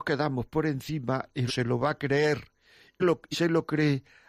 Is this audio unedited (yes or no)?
no